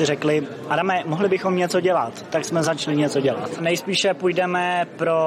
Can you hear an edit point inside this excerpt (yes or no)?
no